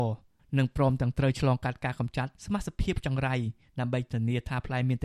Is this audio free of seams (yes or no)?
no